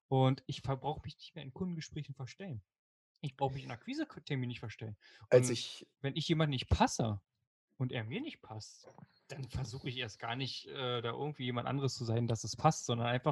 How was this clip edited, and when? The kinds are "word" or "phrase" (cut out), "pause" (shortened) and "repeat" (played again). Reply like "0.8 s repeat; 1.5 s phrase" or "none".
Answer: 5.9 s pause

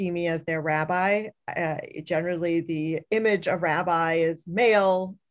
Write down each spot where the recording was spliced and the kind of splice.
none

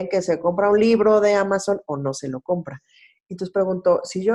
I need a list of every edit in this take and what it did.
none

